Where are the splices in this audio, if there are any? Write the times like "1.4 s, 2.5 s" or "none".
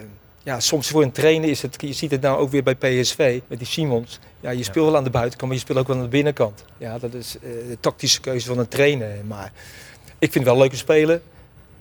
3.4 s, 6.7 s

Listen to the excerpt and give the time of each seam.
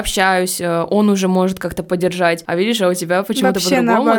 none

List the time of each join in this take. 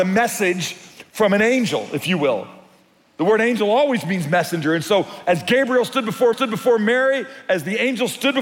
6.3 s

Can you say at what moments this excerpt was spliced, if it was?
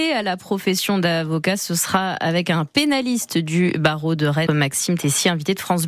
4.5 s

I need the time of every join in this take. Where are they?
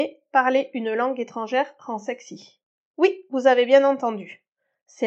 2.7 s

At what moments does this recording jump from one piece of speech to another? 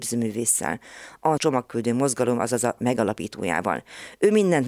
1.4 s, 2.8 s

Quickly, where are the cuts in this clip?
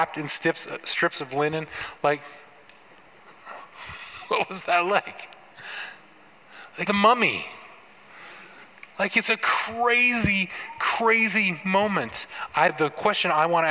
6.8 s, 8.9 s, 12.7 s

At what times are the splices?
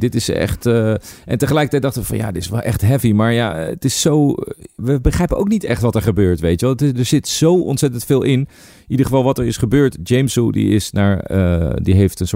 4.8 s

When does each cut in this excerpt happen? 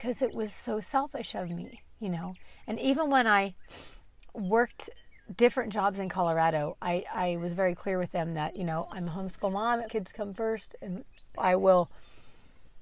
9.9 s, 11.4 s

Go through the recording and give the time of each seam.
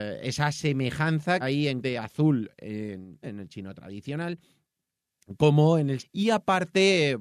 1.4 s, 1.8 s, 3.2 s, 6.0 s

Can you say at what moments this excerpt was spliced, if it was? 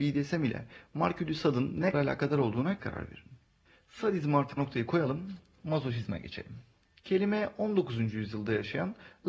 1.9 s, 2.8 s, 4.6 s

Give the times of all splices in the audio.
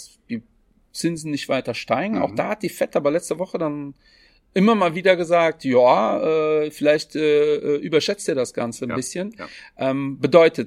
none

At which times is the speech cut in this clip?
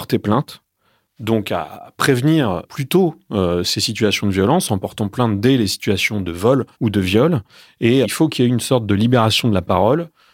6.7 s, 8.0 s

